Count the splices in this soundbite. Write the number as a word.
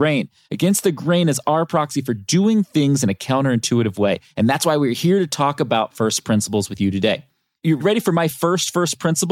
zero